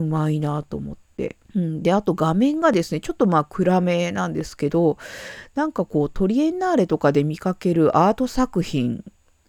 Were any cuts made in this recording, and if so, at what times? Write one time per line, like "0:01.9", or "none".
0:01.4